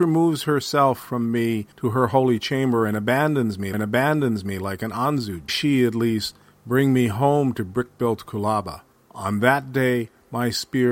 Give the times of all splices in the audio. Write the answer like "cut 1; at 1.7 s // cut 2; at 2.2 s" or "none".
cut 1; at 1.7 s // cut 2; at 3.7 s // cut 3; at 5.5 s // cut 4; at 8.9 s